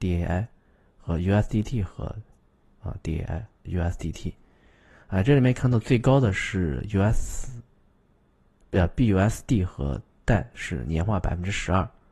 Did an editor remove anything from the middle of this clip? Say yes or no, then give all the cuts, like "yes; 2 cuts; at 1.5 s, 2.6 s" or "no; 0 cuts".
yes; 1 cut; at 3.7 s